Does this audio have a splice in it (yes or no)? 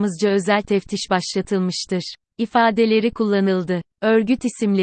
yes